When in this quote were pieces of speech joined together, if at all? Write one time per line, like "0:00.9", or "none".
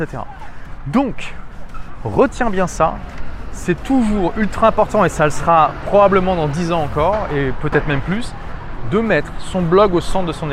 none